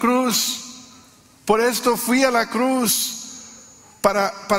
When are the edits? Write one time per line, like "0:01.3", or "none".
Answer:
none